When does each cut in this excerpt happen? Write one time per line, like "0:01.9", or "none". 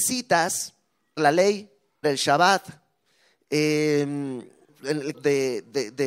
0:01.2
0:02.0
0:04.7
0:05.1